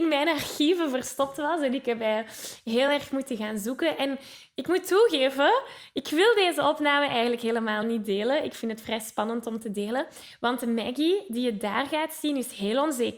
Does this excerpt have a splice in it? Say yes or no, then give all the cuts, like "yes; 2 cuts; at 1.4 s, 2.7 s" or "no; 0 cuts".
no; 0 cuts